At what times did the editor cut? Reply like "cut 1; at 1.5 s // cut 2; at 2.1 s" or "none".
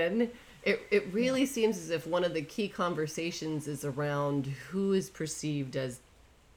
none